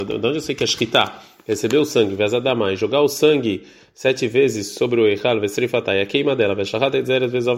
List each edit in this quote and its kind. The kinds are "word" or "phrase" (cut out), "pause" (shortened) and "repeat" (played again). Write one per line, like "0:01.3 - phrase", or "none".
none